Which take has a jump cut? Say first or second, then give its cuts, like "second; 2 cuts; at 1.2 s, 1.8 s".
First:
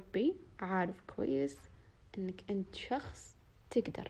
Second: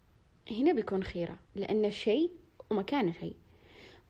second; 1 cut; at 1.5 s